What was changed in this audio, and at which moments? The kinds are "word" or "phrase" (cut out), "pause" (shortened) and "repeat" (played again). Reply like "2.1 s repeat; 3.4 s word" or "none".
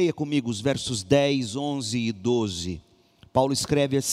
none